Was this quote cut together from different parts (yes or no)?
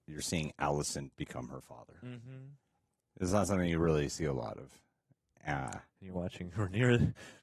no